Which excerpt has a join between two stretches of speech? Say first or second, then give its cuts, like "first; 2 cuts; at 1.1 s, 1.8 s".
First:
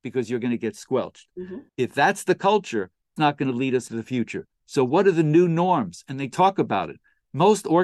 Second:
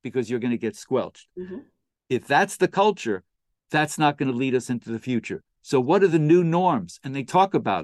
first; 3 cuts; at 1.7 s, 3.2 s, 3.9 s